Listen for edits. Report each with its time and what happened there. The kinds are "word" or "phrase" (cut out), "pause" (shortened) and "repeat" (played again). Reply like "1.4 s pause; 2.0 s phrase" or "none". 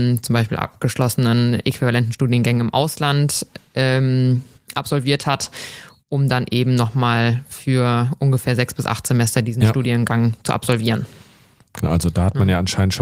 none